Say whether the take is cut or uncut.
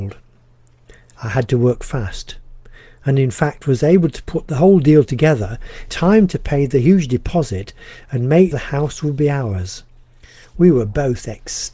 cut